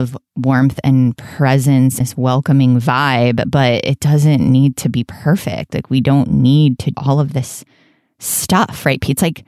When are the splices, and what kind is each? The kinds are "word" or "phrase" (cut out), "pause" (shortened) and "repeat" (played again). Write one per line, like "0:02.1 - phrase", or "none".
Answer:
0:02.0 - word
0:06.9 - word